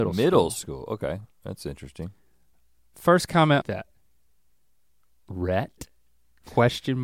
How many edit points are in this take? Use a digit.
1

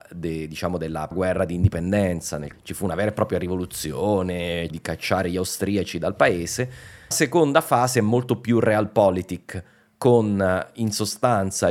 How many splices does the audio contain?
4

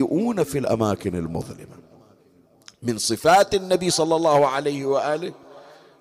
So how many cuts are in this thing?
0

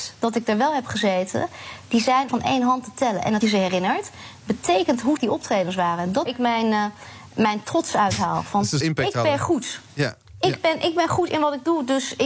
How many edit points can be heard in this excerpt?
5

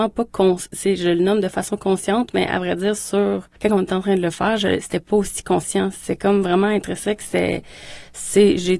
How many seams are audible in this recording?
1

